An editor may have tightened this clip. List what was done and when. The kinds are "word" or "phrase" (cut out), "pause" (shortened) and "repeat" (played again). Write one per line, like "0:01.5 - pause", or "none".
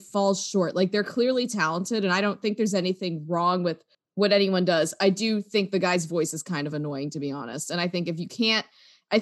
none